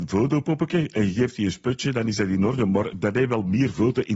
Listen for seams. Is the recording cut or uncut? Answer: uncut